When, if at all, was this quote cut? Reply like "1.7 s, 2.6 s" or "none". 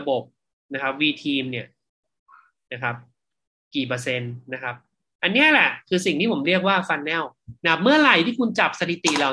none

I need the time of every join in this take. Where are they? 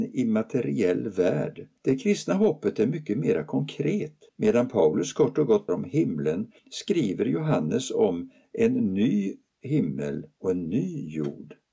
1.8 s, 4.3 s, 5.7 s, 6.6 s

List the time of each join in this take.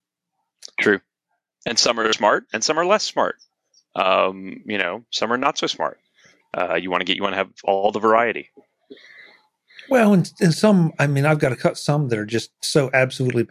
none

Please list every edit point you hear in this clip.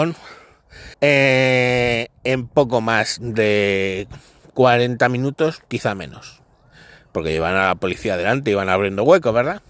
0.9 s

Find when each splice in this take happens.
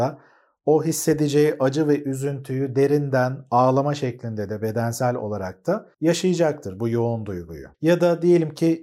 5.9 s, 7.7 s

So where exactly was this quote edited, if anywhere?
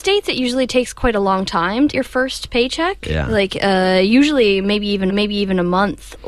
1.9 s, 5.1 s

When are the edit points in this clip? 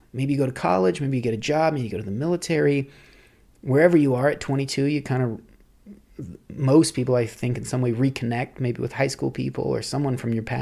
none

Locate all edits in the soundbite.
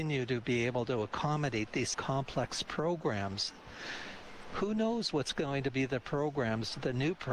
1.9 s

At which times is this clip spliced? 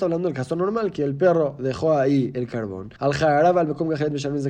3.0 s

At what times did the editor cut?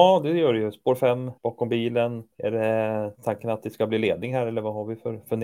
1.4 s, 2.3 s

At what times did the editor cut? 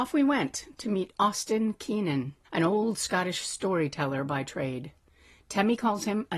2.4 s

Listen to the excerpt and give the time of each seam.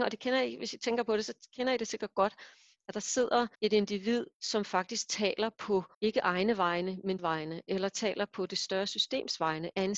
3.5 s, 5.9 s, 7.2 s

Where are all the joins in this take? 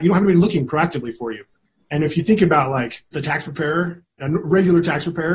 3.1 s

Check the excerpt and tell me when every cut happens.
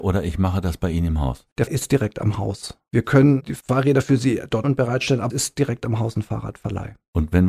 1.7 s, 4.6 s, 5.3 s

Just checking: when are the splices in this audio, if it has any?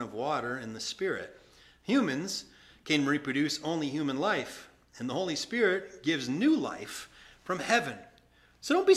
none

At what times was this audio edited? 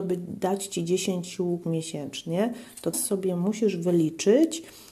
1.6 s, 2.9 s

